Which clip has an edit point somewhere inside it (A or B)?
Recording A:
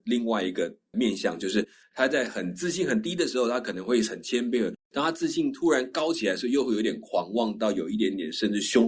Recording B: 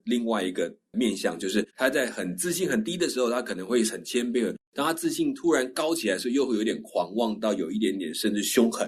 B